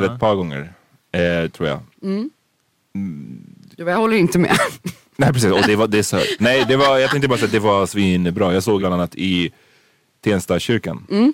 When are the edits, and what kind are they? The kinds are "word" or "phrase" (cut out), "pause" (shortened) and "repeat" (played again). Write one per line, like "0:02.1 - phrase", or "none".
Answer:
0:08.8 - word

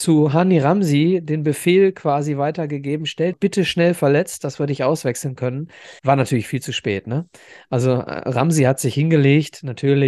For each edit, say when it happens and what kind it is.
0:03.3 - phrase
0:06.0 - pause

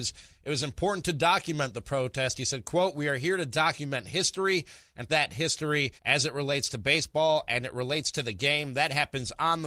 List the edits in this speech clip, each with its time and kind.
0:05.1 - word
0:06.0 - pause

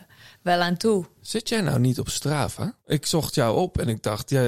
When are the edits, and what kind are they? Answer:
0:02.8 - pause

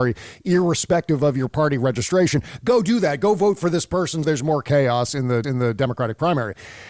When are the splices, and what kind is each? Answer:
0:04.2 - word
0:05.4 - repeat

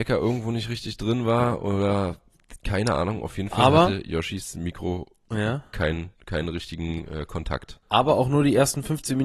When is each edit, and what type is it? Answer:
0:06.1 - pause
0:07.8 - pause

